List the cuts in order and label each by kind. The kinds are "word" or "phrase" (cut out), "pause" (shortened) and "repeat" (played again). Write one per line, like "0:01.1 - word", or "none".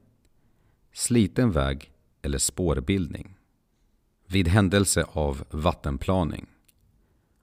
none

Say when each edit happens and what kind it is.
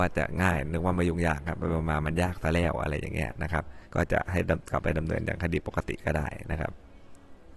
0:03.8 - pause

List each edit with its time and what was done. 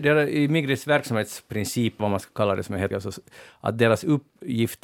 0:02.0 - word
0:02.9 - word

